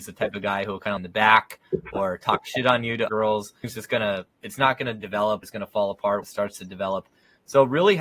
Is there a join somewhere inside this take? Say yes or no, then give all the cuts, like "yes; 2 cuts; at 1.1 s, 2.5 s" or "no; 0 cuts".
yes; 5 cuts; at 1.0 s, 3.1 s, 3.6 s, 5.4 s, 6.2 s